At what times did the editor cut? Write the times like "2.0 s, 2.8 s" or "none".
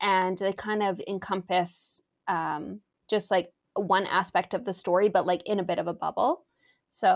3.0 s